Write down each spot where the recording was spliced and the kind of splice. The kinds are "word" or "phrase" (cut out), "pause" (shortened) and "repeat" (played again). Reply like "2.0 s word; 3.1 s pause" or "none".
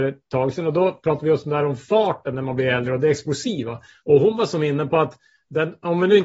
none